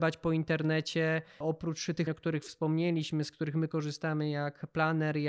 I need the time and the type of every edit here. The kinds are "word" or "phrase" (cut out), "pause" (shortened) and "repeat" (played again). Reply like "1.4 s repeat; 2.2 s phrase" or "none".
2.1 s word